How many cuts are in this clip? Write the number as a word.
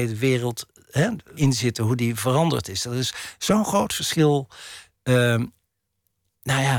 one